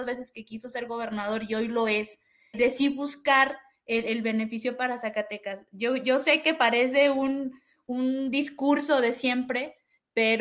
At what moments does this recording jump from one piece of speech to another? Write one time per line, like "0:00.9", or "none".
0:02.5